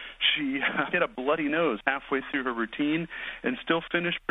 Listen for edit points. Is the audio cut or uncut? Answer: cut